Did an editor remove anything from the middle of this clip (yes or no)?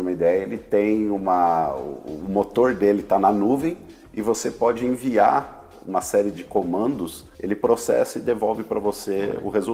yes